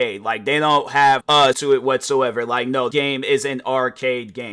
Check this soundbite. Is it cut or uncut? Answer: cut